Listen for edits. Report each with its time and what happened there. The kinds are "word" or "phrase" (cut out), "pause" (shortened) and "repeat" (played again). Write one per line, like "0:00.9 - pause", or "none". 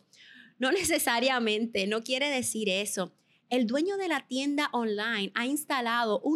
none